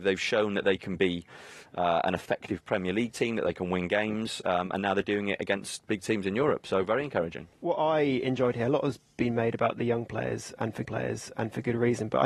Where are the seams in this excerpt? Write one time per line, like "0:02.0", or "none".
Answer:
0:10.8